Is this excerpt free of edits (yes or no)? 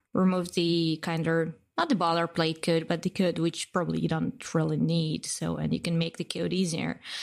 yes